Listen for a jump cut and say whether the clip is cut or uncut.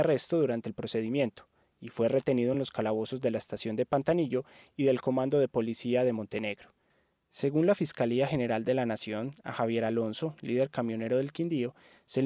uncut